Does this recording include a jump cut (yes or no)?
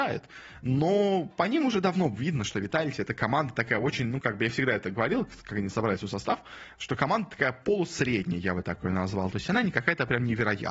no